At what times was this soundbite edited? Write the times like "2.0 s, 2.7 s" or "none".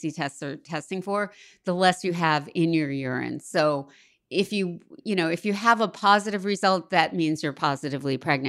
none

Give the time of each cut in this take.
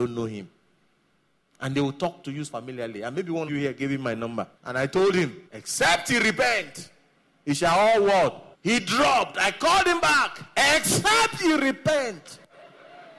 2.5 s, 3.5 s, 4.5 s, 5.5 s, 8.5 s

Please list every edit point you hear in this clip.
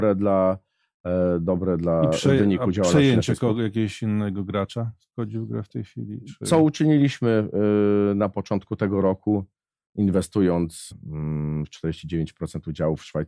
10.9 s

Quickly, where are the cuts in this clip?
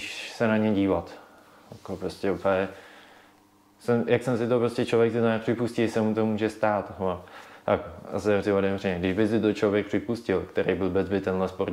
8.4 s

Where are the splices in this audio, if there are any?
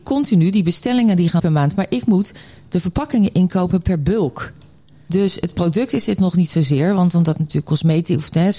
1.4 s

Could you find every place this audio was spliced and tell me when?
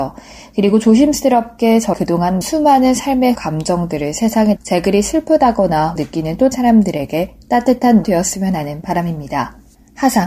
1.9 s, 2.4 s, 3.3 s, 4.6 s, 6.0 s, 6.5 s, 8.0 s

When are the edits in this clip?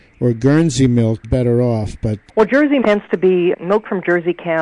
1.2 s, 2.3 s, 2.8 s, 3.5 s

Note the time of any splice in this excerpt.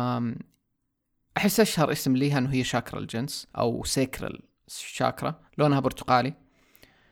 3.5 s, 5.5 s

